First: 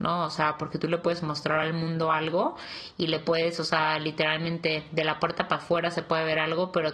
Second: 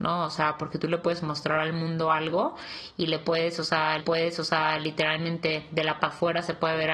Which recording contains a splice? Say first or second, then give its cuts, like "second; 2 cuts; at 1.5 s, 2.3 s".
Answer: second; 2 cuts; at 4.0 s, 6.0 s